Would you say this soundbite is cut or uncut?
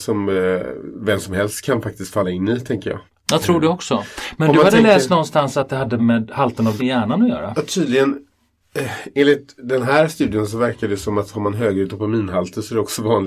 cut